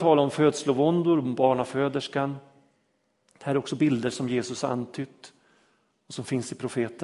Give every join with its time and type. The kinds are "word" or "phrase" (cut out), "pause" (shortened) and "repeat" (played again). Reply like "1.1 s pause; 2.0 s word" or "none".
none